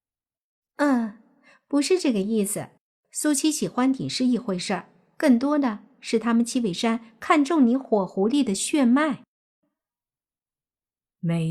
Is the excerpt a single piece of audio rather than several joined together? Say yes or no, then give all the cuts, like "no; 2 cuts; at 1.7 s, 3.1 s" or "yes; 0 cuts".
yes; 0 cuts